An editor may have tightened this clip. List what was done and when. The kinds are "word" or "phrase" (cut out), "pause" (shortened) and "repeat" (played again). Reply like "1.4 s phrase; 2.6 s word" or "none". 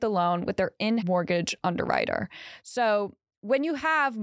1.0 s word